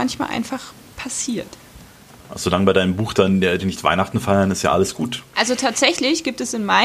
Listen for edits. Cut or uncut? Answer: cut